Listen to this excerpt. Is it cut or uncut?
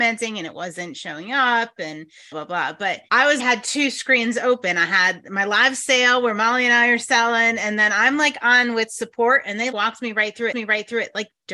cut